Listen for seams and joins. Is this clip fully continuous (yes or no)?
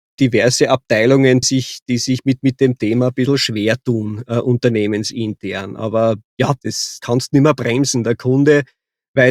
no